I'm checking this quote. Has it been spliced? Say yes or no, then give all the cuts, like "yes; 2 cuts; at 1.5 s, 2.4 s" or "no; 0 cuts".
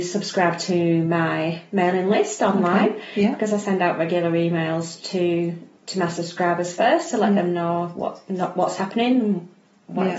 no; 0 cuts